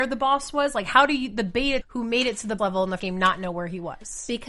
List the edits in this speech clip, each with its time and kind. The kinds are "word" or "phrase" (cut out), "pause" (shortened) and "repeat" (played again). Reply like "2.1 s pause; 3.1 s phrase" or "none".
1.8 s word; 2.6 s word; 3.0 s word